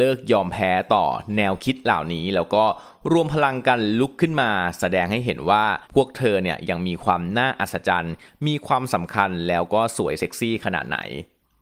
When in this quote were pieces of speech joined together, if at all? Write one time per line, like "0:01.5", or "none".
0:05.8